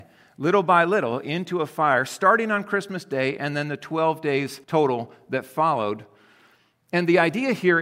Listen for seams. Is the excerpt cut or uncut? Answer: cut